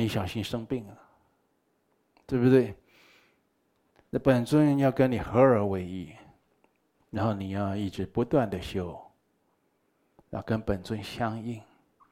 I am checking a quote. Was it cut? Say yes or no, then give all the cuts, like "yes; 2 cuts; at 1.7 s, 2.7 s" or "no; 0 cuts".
no; 0 cuts